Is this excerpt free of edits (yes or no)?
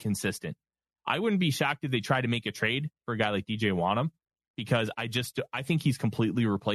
yes